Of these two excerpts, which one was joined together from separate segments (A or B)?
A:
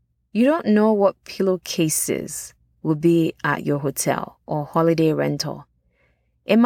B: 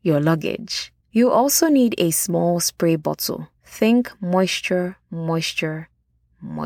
B